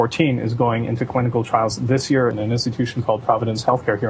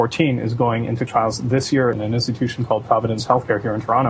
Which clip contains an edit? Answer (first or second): second